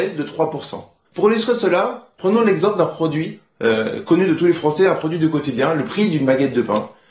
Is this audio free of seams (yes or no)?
yes